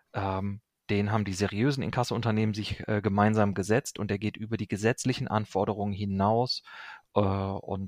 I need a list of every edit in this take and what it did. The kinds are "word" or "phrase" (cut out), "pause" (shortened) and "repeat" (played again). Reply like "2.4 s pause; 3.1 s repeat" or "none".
none